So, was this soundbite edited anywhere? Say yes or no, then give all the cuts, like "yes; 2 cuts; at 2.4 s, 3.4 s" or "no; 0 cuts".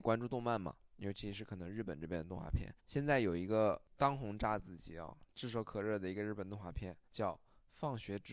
yes; 2 cuts; at 2.8 s, 7.1 s